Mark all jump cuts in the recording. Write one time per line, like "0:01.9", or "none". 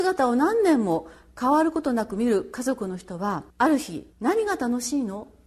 0:03.5
0:04.1